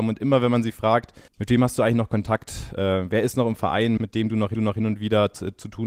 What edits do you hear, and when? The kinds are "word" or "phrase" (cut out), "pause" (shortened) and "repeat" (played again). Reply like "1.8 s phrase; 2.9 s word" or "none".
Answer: 1.3 s pause; 4.0 s word; 4.5 s repeat